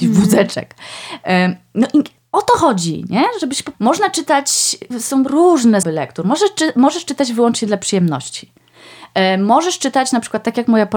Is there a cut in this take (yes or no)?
yes